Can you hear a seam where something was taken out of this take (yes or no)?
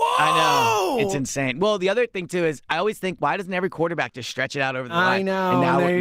no